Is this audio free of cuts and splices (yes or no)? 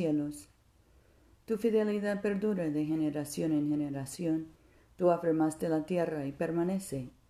yes